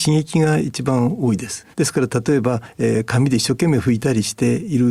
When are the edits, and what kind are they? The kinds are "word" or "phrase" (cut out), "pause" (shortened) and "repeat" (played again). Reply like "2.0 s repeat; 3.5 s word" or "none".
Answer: 1.7 s pause